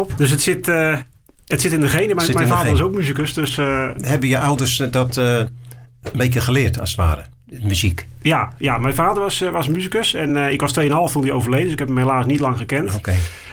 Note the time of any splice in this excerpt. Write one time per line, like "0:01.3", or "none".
none